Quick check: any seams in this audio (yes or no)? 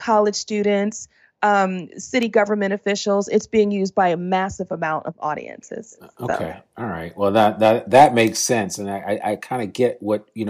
no